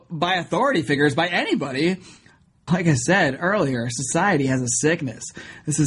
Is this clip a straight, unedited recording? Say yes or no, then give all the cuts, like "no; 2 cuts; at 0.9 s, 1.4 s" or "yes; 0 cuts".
no; 1 cut; at 2.7 s